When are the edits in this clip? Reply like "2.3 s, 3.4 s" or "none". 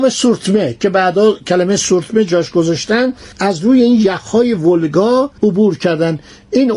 3.3 s, 5.4 s